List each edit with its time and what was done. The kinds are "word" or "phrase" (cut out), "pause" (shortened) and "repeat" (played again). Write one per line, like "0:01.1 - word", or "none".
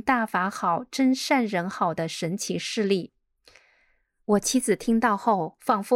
none